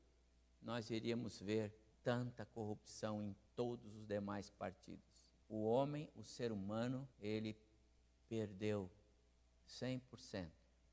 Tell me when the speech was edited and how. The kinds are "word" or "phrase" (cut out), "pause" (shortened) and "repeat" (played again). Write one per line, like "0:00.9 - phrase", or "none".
0:01.9 - pause
0:03.5 - pause
0:05.4 - pause
0:07.1 - pause